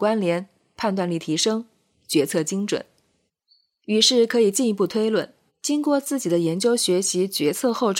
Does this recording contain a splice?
yes; 3 cuts; at 1.9 s, 3.3 s, 5.5 s

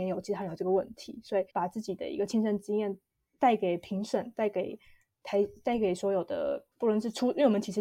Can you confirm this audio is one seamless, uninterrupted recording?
no; 2 cuts; at 1.5 s, 6.7 s

